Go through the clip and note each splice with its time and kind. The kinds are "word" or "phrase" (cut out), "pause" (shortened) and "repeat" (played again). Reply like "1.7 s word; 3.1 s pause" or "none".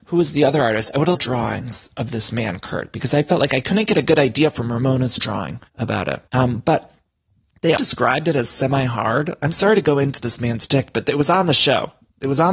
1.1 s phrase; 5.7 s pause; 6.3 s pause; 7.8 s word